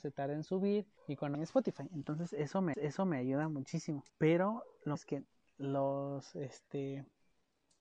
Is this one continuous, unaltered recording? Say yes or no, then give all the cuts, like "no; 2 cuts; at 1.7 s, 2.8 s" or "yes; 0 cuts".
no; 5 cuts; at 1.0 s, 1.3 s, 2.7 s, 4.1 s, 4.9 s